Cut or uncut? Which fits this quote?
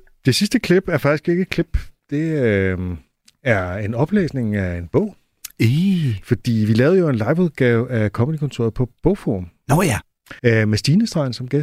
cut